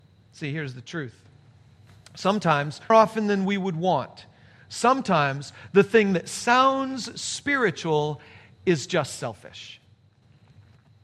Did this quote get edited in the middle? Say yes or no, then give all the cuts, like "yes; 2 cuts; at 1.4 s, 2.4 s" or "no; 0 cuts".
yes; 1 cut; at 2.9 s